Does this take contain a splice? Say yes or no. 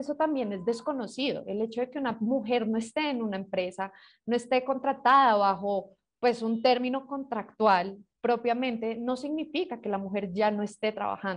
no